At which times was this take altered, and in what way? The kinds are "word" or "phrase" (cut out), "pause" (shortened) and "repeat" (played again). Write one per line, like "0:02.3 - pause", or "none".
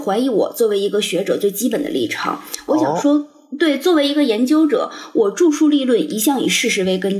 none